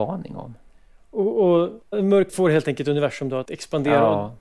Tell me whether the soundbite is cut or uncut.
cut